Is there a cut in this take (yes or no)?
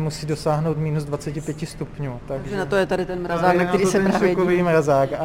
no